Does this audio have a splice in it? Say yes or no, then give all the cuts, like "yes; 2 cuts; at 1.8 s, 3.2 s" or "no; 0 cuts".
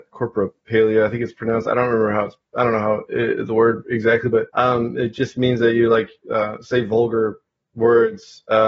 yes; 1 cut; at 4.5 s